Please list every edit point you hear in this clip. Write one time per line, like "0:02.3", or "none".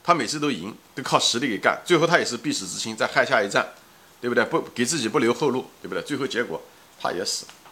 none